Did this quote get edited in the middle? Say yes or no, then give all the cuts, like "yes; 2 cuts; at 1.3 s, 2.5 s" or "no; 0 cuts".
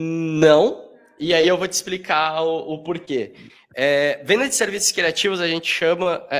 no; 0 cuts